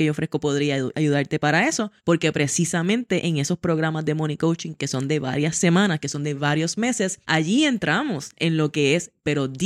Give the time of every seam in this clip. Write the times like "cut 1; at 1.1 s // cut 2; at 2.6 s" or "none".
cut 1; at 2.0 s // cut 2; at 7.2 s